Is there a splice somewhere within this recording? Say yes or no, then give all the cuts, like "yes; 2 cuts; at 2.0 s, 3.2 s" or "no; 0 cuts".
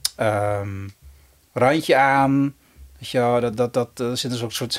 no; 0 cuts